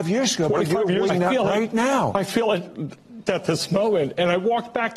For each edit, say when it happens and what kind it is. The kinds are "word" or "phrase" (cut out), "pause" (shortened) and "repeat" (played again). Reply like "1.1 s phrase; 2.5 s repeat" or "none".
1.1 s word; 3.3 s word